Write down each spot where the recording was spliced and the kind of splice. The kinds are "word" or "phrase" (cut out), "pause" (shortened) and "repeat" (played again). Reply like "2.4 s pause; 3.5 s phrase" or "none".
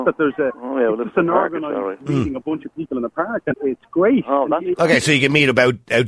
3.5 s word